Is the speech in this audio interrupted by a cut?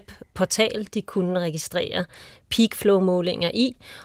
no; 0 cuts

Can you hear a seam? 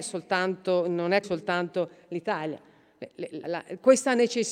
yes; 2 cuts; at 1.2 s, 3.4 s

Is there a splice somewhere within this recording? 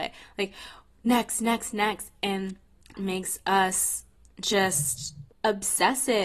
yes; 2 cuts; at 2.9 s, 5.3 s

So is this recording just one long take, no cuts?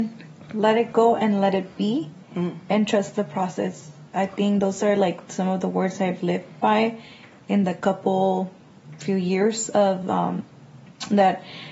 yes; 0 cuts

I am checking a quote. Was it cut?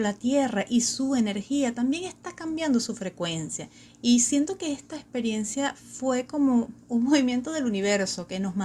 no; 0 cuts

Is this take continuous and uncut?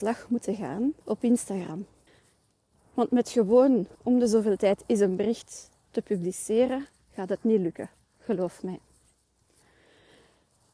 no; 3 cuts; at 1.0 s, 2.1 s, 3.9 s

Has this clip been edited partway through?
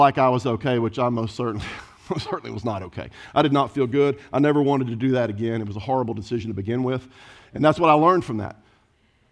no; 0 cuts

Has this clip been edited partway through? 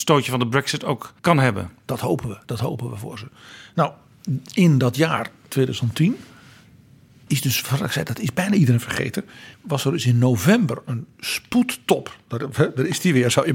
yes; 4 cuts; at 1.2 s, 7.3 s, 9.5 s, 11.1 s

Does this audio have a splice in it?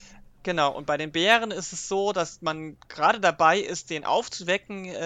no; 0 cuts

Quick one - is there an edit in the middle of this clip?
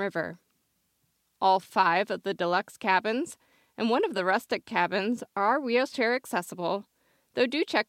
no; 0 cuts

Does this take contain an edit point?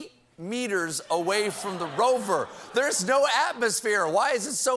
no; 0 cuts

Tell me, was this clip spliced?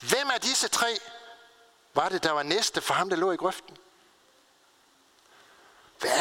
no; 0 cuts

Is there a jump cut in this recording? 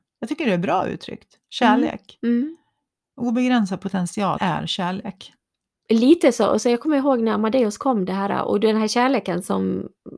yes; 1 cut; at 4.4 s

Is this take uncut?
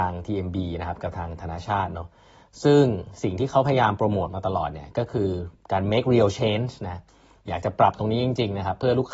yes; 0 cuts

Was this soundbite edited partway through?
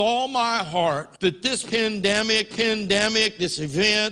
yes; 2 cuts; at 1.2 s, 2.5 s

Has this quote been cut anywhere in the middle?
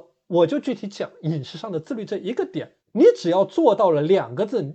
yes; 1 cut; at 2.8 s

